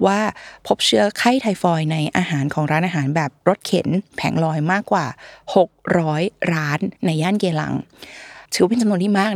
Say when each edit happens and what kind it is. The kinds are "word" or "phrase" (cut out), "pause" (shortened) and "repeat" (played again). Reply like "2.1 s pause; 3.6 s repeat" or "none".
7.0 s pause; 8.4 s pause